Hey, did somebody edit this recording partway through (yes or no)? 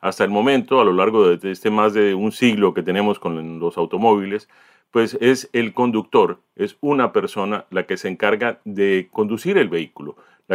no